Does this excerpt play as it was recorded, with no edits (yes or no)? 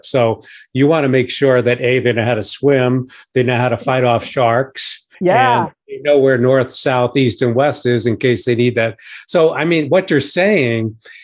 no